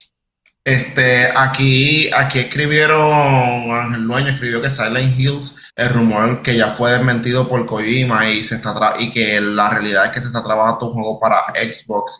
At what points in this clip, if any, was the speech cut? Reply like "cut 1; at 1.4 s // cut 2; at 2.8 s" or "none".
cut 1; at 5.7 s